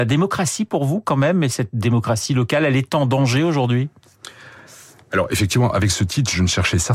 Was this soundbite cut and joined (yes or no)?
no